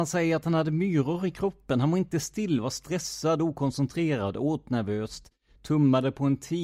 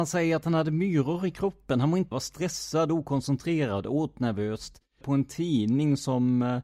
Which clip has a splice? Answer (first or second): second